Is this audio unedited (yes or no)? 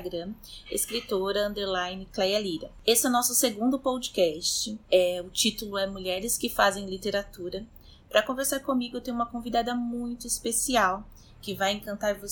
no